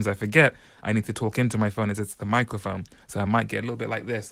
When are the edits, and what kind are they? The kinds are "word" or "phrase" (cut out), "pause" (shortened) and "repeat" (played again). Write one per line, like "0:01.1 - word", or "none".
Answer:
none

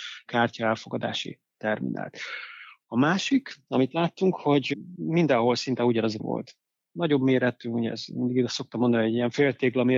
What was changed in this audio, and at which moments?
0:06.2 - word

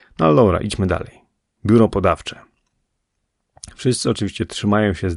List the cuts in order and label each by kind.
none

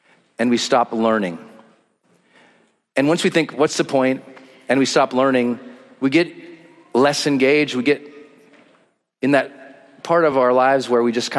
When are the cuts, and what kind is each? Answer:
none

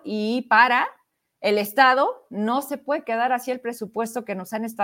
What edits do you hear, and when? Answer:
none

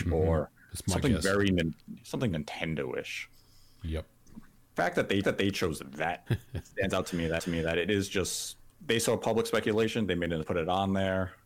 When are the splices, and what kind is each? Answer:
0:02.3 - word
0:05.2 - repeat
0:06.3 - word
0:07.4 - repeat
0:08.7 - pause
0:10.4 - phrase

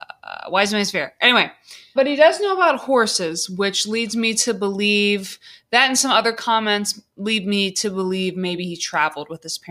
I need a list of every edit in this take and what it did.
0:02.0 - word

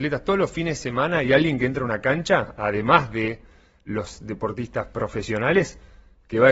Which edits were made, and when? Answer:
none

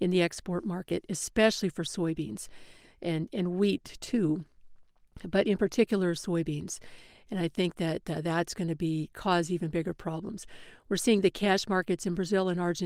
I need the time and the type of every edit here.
none

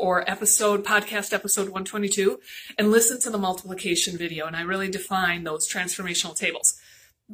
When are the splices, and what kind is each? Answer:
none

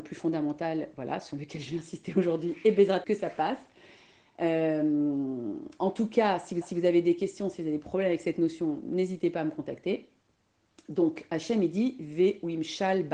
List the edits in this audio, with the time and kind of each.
0:03.0 - word
0:06.6 - repeat

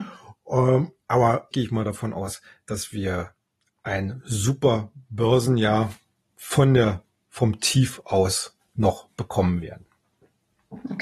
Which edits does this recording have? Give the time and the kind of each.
0:01.5 - word
0:08.6 - word

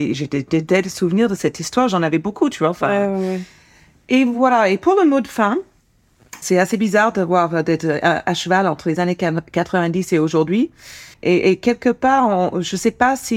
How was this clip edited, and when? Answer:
0:06.4 - word
0:11.1 - pause

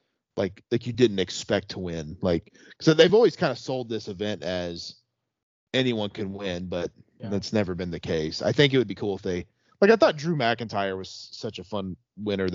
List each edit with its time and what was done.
none

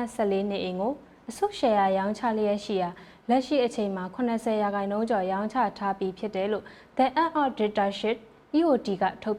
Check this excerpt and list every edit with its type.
none

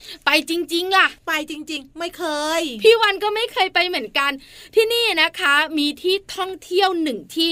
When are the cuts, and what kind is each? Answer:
0:01.2 - pause

